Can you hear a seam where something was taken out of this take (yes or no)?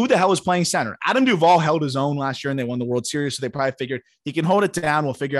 no